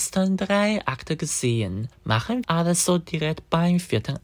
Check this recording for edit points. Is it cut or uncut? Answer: cut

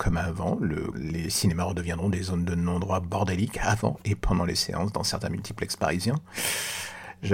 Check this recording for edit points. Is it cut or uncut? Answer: cut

